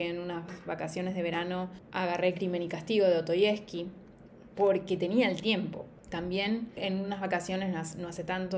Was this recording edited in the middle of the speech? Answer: yes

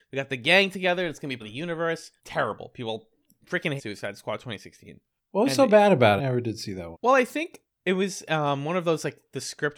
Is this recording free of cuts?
no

